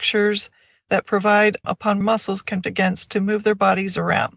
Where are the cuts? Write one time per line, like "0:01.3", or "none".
0:01.6
0:02.0
0:02.6

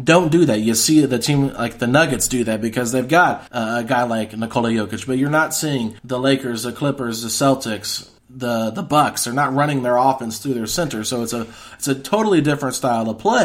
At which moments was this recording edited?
0:03.5
0:06.0
0:08.2

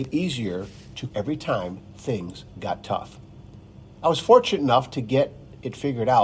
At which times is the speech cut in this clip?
0:01.1

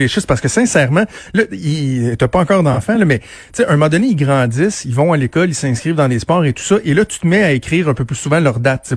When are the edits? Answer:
none

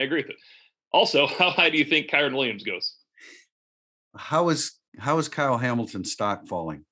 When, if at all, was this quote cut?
0:03.6
0:04.9

